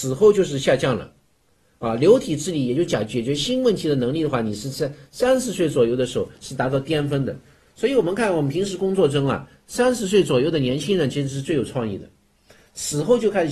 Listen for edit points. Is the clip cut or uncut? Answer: uncut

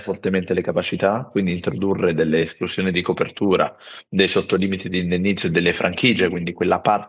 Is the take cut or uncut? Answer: uncut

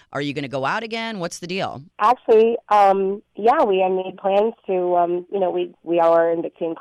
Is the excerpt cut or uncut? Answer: cut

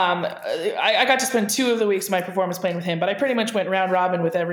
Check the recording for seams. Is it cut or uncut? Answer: uncut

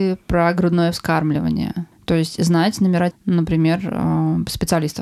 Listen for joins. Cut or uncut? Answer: cut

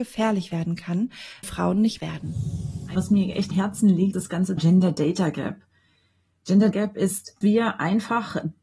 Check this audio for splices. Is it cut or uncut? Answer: cut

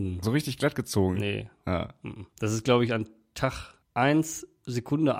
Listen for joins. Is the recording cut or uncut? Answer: cut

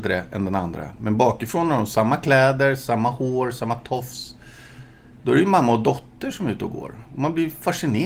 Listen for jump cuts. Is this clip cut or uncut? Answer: cut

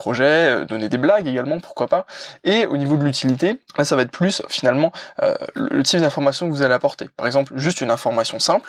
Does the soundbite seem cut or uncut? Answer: cut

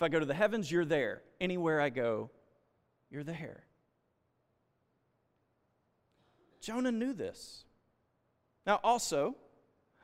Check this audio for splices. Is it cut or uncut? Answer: uncut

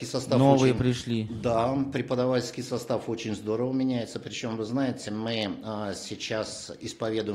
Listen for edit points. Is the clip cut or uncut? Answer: uncut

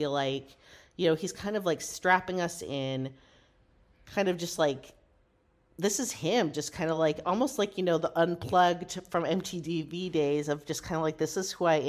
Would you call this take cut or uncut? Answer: uncut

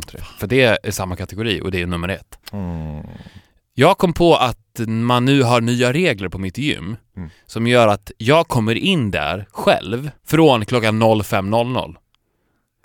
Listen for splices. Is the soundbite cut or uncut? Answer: cut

